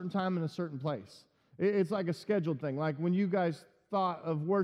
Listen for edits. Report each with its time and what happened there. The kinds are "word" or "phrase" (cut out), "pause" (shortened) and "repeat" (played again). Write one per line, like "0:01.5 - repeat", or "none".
none